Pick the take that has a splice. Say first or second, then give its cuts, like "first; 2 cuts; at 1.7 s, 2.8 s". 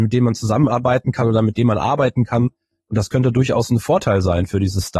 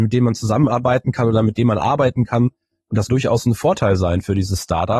second; 1 cut; at 3.1 s